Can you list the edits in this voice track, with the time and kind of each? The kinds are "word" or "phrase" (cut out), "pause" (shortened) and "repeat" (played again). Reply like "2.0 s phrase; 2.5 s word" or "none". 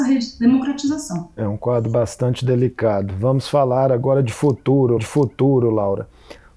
5.0 s repeat